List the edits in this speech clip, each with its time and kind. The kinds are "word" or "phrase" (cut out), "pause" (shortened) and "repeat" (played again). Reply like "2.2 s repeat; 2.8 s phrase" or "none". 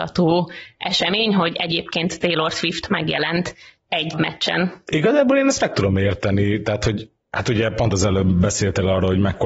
4.1 s word